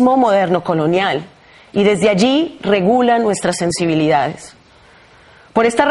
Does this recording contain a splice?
no; 0 cuts

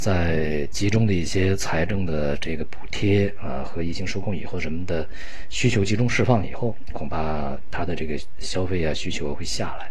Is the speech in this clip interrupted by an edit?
no; 0 cuts

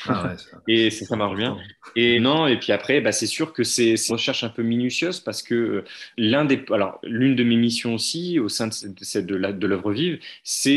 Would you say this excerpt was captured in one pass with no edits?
no; 3 cuts; at 2.2 s, 4.1 s, 6.1 s

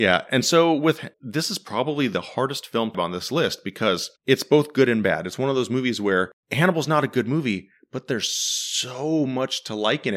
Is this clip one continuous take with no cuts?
no; 4 cuts; at 1.1 s, 2.9 s, 4.2 s, 6.4 s

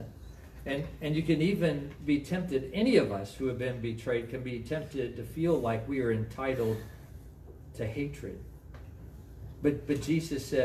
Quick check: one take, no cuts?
yes; 0 cuts

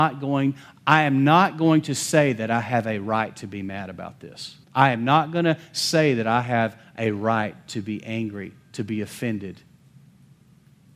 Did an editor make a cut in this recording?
yes; 1 cut; at 4.6 s

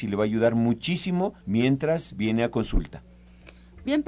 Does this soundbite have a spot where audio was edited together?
yes; 1 cut; at 1.4 s

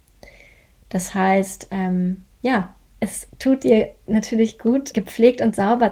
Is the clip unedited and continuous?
no; 1 cut; at 4.9 s

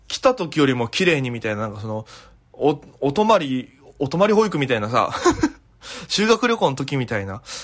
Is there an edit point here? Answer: no; 0 cuts

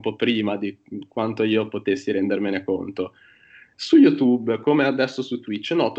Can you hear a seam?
no; 0 cuts

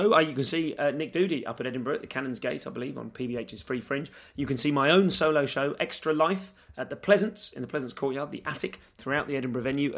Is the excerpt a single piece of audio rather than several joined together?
yes; 0 cuts

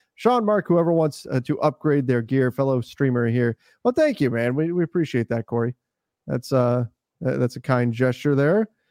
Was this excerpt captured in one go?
yes; 0 cuts

